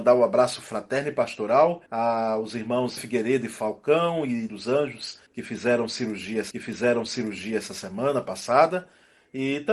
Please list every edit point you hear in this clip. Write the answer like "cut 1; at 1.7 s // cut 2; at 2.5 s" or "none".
cut 1; at 1.9 s // cut 2; at 3.0 s // cut 3; at 4.5 s // cut 4; at 5.3 s // cut 5; at 6.5 s